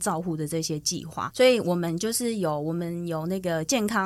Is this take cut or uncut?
cut